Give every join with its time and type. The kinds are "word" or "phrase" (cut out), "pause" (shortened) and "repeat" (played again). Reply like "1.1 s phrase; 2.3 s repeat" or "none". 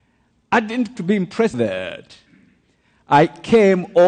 1.0 s word; 1.5 s phrase

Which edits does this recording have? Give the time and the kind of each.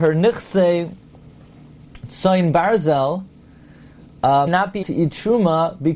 4.5 s word; 4.8 s word

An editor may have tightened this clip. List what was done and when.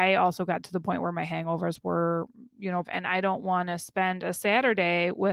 2.8 s phrase

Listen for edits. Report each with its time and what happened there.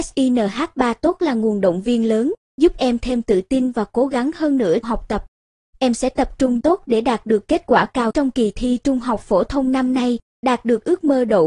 4.8 s word; 6.6 s phrase; 8.1 s word

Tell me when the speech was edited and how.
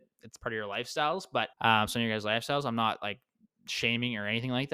1.5 s pause

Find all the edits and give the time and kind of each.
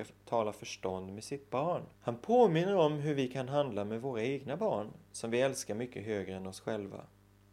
1.9 s pause

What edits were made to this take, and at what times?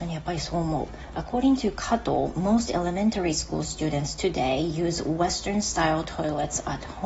none

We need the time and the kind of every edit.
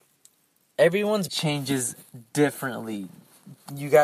1.3 s word

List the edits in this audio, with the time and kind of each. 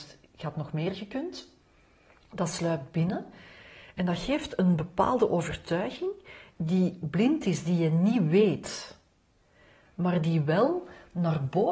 none

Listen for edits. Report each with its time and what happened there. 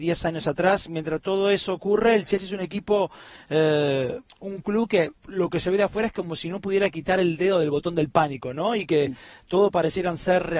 4.3 s pause; 5.2 s pause

